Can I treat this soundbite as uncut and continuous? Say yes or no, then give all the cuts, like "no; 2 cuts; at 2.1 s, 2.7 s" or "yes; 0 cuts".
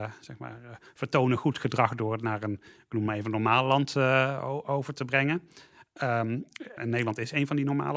no; 1 cut; at 6.8 s